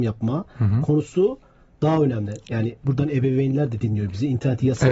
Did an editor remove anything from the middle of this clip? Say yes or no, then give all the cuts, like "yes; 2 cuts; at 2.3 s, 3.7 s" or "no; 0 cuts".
no; 0 cuts